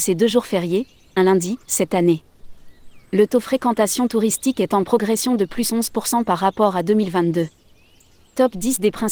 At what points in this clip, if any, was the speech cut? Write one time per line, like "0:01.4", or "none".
0:01.6